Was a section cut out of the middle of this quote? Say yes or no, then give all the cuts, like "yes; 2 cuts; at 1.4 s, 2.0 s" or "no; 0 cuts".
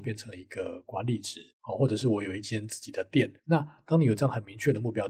yes; 2 cuts; at 1.5 s, 3.4 s